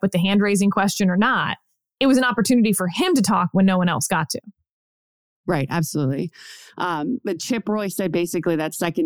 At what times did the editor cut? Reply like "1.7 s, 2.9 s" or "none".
none